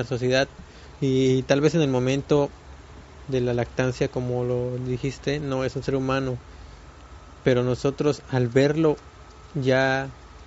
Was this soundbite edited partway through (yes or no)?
no